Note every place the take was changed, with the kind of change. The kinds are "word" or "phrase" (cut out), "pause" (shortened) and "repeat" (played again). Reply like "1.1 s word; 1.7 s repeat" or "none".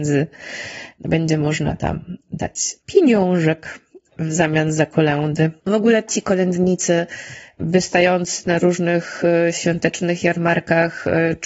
5.6 s pause